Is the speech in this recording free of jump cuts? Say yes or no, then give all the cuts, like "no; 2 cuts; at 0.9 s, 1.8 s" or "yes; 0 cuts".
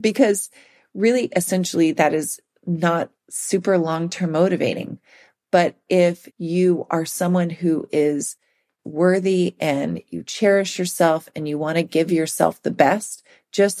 no; 2 cuts; at 3.2 s, 6.3 s